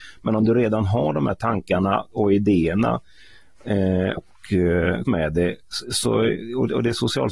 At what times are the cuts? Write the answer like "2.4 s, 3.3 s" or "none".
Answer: 2.1 s, 4.2 s, 5.0 s